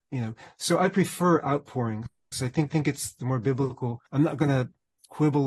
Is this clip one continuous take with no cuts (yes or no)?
no